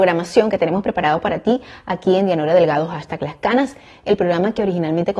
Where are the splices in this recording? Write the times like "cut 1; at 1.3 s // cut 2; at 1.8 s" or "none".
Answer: none